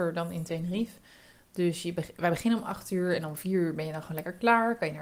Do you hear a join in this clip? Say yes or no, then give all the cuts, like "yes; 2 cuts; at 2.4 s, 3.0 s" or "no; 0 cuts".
no; 0 cuts